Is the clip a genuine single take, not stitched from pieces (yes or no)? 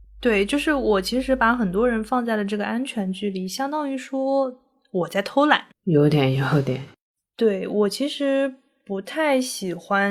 no